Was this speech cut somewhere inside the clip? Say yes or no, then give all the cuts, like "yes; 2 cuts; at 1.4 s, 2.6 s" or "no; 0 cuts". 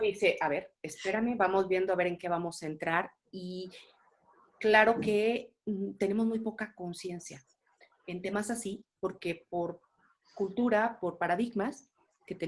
no; 0 cuts